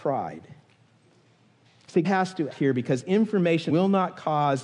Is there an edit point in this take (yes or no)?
yes